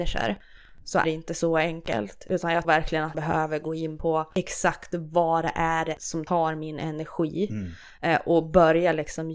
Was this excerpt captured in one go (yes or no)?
no